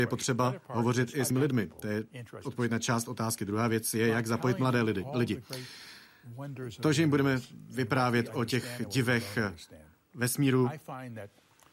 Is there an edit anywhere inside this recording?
yes; 1 cut; at 1.3 s

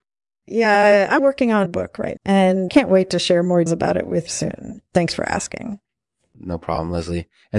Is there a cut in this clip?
yes; 6 cuts; at 1.2 s, 1.7 s, 2.2 s, 2.7 s, 3.7 s, 4.3 s

